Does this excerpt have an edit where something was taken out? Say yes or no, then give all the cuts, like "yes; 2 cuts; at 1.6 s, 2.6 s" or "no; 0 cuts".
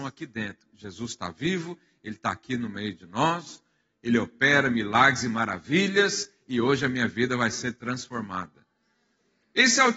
no; 0 cuts